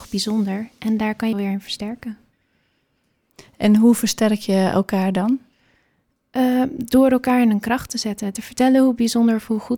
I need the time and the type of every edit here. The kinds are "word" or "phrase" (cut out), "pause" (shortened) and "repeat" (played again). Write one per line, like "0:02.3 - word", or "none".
0:01.3 - phrase